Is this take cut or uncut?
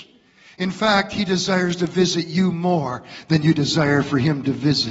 uncut